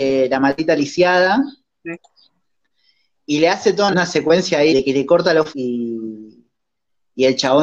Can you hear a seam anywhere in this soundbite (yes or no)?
yes